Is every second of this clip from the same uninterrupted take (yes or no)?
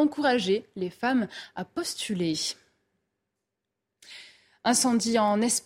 yes